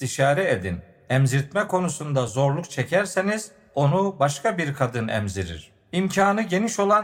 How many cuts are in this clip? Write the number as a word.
zero